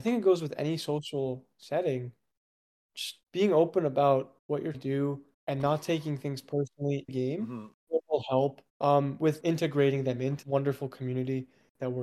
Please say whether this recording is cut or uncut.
cut